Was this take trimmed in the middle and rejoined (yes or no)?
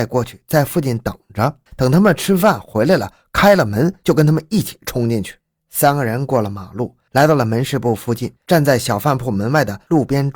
yes